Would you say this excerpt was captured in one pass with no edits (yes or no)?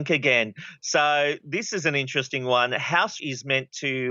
no